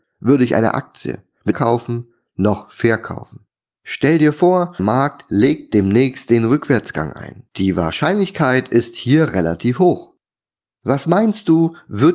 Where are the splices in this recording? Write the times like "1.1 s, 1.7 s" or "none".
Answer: 1.5 s, 3.7 s, 4.8 s, 7.5 s